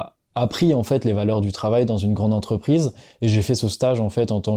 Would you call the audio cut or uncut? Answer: uncut